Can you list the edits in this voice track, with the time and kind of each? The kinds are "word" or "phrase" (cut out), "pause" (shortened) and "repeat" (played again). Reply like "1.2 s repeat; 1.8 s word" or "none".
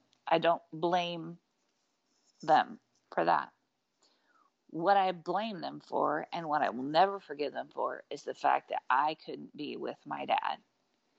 none